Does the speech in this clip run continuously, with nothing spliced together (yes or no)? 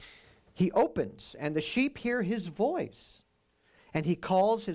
yes